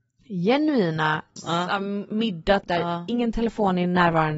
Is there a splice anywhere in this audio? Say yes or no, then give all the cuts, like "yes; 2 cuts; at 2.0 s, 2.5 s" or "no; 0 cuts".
yes; 2 cuts; at 1.4 s, 2.6 s